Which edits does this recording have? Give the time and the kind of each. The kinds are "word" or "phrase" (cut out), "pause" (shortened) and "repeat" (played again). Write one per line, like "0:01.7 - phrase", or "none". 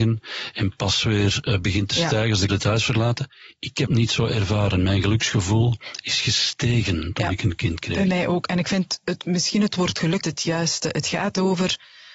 0:02.5 - word
0:03.9 - word
0:10.2 - word